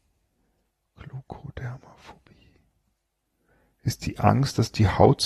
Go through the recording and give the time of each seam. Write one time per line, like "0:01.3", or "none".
none